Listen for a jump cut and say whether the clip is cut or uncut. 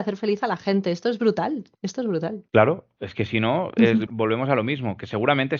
cut